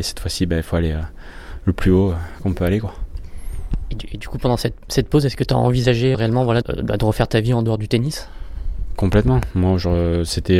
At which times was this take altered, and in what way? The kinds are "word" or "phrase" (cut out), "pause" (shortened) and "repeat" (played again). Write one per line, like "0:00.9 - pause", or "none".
0:06.1 - word
0:06.6 - word

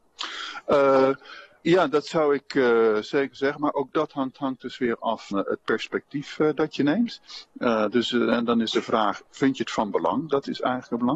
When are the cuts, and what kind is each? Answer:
0:04.3 - repeat
0:05.3 - word

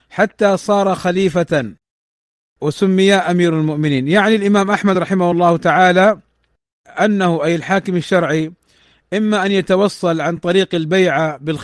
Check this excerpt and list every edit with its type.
none

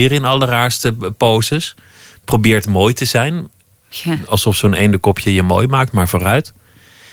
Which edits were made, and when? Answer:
none

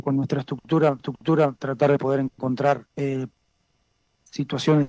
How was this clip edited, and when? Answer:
0:01.0 - repeat
0:02.0 - phrase
0:02.9 - pause

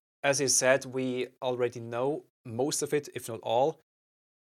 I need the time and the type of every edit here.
0:02.3 - pause

